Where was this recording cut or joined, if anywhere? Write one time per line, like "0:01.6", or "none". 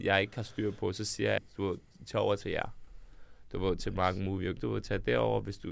0:01.4
0:04.6